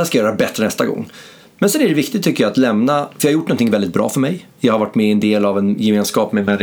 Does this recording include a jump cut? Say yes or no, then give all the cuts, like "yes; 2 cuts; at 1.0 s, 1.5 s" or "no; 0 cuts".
no; 0 cuts